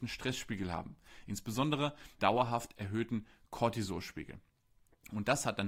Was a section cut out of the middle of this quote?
yes; 1 cut; at 2.2 s

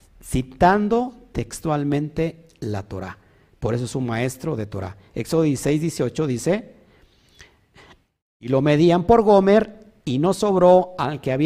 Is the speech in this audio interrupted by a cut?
no; 0 cuts

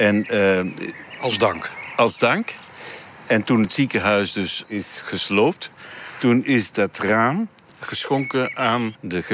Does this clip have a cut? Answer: no; 0 cuts

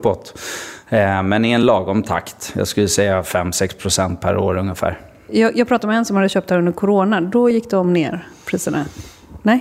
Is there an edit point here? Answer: no; 0 cuts

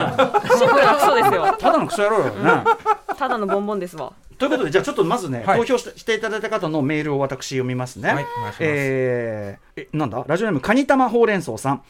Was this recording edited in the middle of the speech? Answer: yes; 1 cut; at 9.7 s

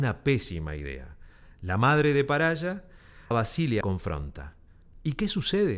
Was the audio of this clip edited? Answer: yes; 2 cuts; at 3.3 s, 3.8 s

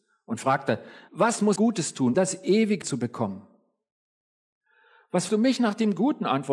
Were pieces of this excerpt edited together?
yes; 5 cuts; at 1.1 s, 1.6 s, 2.1 s, 2.8 s, 5.3 s

